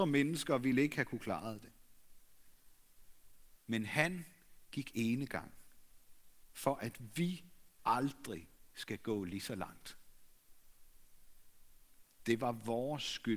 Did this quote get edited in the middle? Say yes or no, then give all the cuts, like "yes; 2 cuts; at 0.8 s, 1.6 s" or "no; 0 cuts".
no; 0 cuts